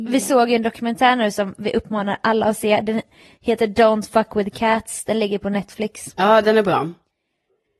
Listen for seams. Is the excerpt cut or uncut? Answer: uncut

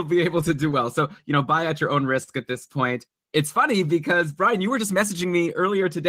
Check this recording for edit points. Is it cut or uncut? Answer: uncut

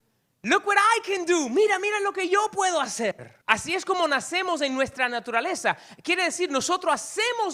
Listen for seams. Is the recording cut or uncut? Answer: cut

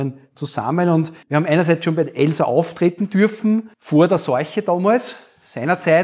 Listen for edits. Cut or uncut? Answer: cut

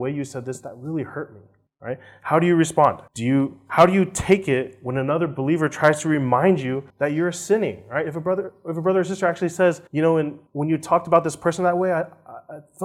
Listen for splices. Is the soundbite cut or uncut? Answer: cut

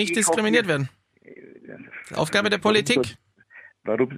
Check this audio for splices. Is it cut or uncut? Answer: uncut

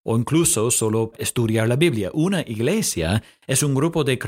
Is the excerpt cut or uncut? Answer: cut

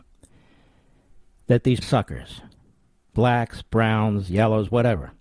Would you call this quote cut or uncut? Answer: cut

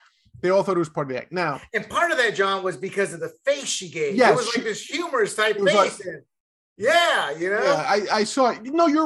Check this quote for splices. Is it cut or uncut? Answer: uncut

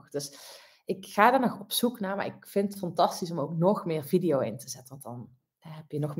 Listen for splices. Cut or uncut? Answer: uncut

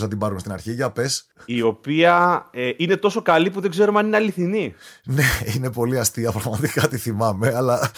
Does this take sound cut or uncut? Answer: uncut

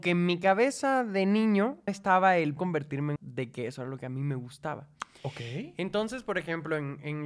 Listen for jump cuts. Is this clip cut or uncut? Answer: cut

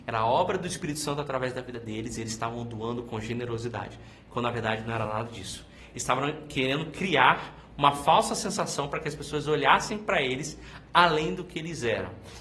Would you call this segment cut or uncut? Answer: uncut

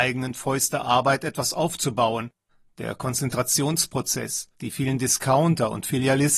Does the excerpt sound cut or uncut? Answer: cut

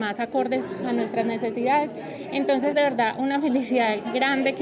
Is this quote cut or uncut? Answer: cut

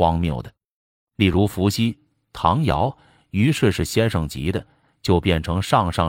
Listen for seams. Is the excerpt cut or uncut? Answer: uncut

